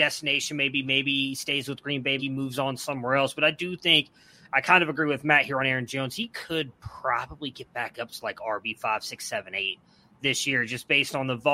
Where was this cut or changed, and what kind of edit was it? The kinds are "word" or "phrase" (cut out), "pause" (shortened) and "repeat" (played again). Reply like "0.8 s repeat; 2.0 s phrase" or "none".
2.2 s word